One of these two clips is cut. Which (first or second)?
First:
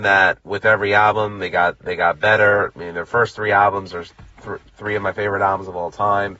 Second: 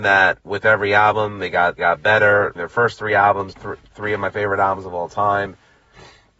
second